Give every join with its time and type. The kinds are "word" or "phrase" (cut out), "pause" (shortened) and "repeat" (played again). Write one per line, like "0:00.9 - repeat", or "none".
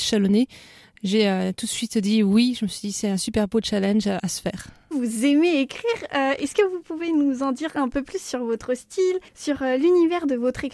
0:04.2 - word
0:09.3 - pause

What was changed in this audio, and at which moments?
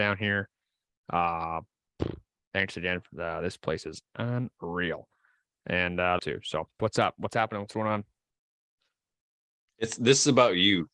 0:06.2 - phrase
0:06.8 - word

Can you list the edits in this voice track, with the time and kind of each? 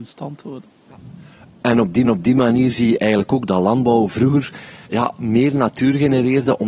0:02.0 - repeat
0:04.8 - pause

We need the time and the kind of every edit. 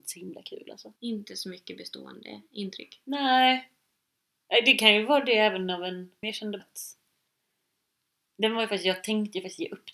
0:01.0 - pause
0:06.2 - phrase
0:06.6 - word

